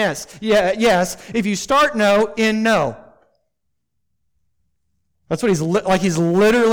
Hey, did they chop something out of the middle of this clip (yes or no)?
no